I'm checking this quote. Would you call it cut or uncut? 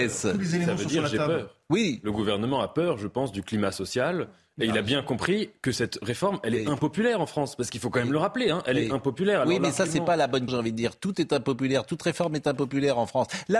cut